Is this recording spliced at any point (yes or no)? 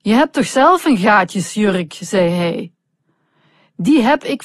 no